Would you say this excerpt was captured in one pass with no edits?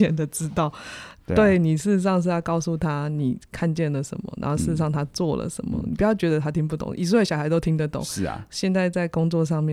yes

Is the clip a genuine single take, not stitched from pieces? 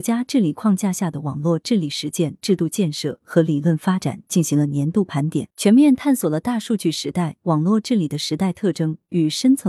no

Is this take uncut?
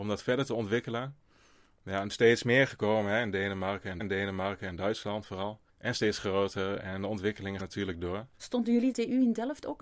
no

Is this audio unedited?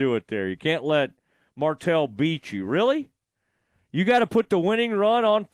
yes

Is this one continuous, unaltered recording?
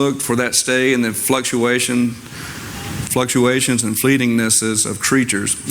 yes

